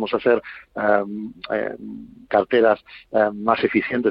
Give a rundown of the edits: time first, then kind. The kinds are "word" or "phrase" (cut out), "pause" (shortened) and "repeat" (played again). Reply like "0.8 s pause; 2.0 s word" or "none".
none